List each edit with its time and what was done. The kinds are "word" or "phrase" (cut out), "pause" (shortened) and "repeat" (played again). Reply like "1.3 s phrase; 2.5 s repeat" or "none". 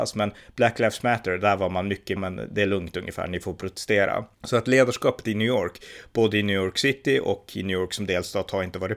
2.2 s phrase; 4.3 s pause